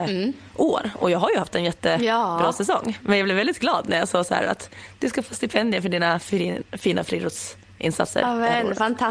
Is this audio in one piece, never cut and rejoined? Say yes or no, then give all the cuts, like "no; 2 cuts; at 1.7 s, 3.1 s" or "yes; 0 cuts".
yes; 0 cuts